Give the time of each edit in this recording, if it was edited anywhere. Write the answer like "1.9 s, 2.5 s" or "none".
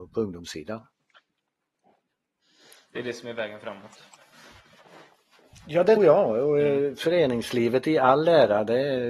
6.0 s